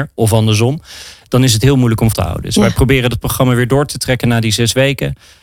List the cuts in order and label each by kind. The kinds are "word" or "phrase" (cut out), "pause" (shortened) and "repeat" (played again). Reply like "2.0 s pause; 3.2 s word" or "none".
2.1 s word